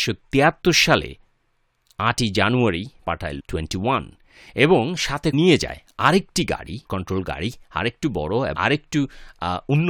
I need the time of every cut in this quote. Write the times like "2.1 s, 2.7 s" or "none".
3.0 s, 3.4 s, 5.3 s, 6.9 s, 8.5 s